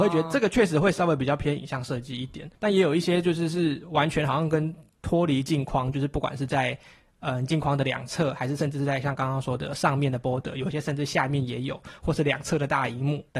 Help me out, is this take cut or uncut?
cut